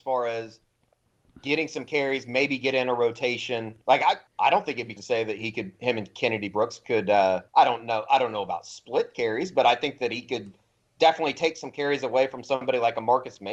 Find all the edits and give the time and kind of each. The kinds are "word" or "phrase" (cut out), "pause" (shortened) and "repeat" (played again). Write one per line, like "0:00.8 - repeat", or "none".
0:03.8 - pause
0:04.3 - pause
0:05.0 - word
0:07.5 - pause